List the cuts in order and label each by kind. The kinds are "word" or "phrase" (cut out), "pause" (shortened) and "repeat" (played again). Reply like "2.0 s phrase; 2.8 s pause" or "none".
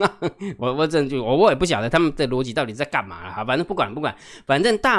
none